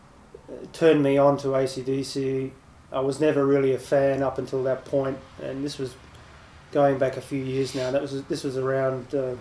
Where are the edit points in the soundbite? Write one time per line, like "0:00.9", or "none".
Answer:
none